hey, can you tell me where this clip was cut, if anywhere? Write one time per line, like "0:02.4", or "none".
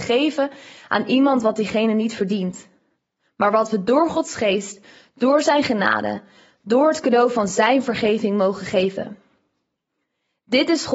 none